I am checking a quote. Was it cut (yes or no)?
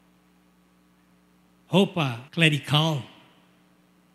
yes